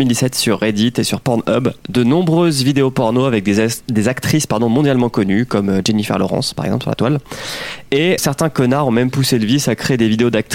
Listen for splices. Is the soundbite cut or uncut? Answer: cut